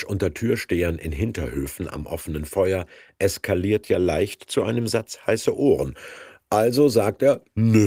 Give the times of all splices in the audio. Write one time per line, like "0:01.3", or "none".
none